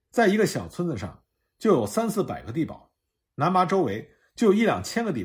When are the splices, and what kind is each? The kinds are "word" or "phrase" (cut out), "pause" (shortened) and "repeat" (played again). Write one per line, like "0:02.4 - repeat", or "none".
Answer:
none